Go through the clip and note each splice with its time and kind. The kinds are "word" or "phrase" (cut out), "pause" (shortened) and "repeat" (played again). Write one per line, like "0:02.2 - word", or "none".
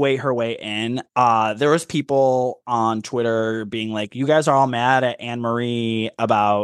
0:01.1 - pause